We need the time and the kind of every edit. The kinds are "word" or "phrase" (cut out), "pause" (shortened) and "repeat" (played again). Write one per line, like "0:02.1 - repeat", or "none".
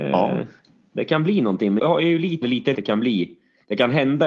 0:01.8 - word
0:02.4 - word
0:02.7 - phrase